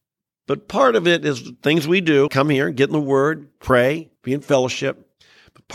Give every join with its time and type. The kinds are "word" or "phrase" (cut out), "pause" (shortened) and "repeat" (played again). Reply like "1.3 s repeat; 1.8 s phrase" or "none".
2.3 s word; 4.2 s pause